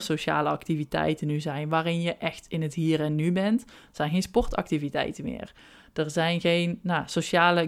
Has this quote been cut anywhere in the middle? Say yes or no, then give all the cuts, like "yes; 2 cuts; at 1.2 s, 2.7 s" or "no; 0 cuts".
no; 0 cuts